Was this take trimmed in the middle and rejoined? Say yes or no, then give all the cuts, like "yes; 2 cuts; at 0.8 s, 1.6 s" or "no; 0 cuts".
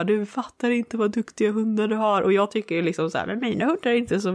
no; 0 cuts